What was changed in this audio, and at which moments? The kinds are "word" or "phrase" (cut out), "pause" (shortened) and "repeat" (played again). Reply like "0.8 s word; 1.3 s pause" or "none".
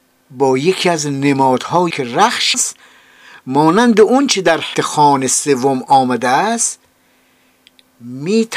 1.9 s word; 2.5 s word; 4.7 s word